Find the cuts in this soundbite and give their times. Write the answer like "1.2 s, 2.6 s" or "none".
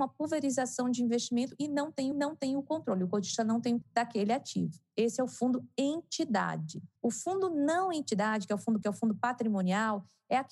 2.1 s, 3.8 s, 7.0 s, 8.8 s